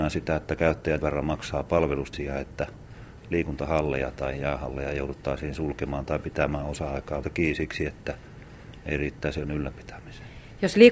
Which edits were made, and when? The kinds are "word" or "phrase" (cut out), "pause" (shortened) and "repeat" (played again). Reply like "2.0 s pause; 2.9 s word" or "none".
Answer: 1.0 s word; 2.1 s word; 7.2 s word; 9.4 s phrase